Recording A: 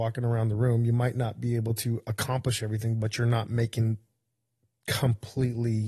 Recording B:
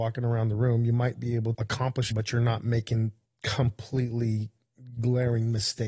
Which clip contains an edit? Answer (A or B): B